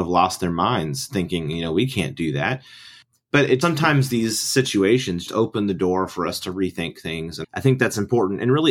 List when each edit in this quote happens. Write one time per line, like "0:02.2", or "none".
0:03.6
0:05.3
0:07.4